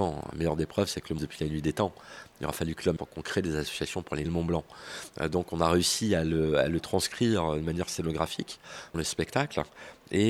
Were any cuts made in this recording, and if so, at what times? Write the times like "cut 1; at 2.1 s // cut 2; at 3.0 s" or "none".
cut 1; at 1.2 s // cut 2; at 3.0 s // cut 3; at 4.2 s // cut 4; at 8.9 s